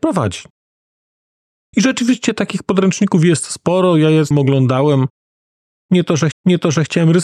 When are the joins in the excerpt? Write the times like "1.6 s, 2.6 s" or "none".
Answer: 4.3 s, 6.3 s